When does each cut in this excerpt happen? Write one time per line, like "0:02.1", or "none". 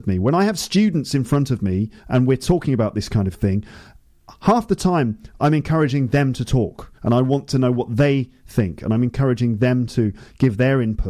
0:02.0
0:07.0